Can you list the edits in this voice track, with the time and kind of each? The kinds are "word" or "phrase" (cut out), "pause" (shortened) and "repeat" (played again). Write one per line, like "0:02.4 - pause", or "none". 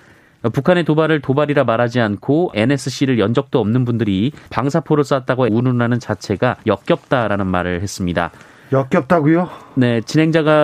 0:02.5 - phrase
0:04.5 - pause
0:05.5 - phrase
0:06.6 - pause